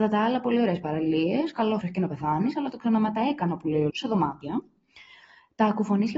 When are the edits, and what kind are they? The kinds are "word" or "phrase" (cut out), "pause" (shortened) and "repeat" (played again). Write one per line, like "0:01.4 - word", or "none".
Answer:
0:01.8 - phrase
0:03.9 - word